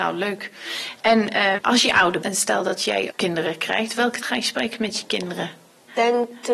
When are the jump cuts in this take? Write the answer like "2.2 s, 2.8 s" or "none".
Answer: 1.6 s, 2.2 s, 3.1 s, 4.2 s